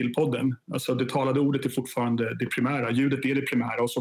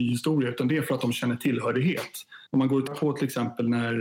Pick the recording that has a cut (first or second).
second